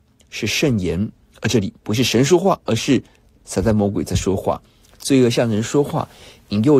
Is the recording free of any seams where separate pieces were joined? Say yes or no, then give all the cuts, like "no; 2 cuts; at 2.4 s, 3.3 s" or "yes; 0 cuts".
yes; 0 cuts